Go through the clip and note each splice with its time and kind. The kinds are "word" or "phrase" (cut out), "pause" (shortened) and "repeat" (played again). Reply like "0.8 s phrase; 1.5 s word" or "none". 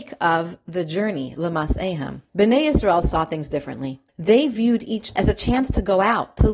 2.3 s pause; 4.1 s pause; 5.2 s word